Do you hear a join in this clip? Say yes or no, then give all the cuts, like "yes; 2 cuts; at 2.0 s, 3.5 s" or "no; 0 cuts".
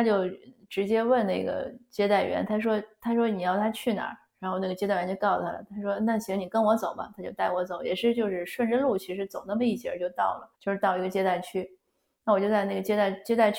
yes; 1 cut; at 10.5 s